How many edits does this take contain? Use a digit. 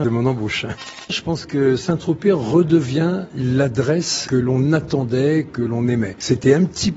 0